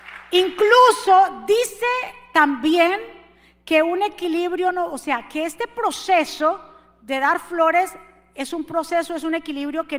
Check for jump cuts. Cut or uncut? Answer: uncut